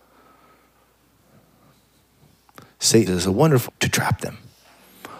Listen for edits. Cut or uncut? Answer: cut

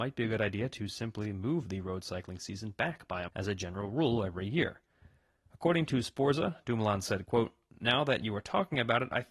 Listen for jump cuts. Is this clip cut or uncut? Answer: cut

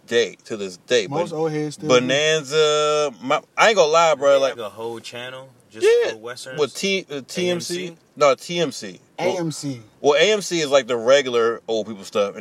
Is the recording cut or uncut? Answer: cut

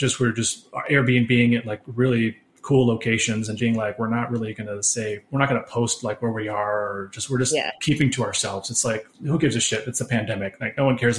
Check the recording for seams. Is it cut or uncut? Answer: cut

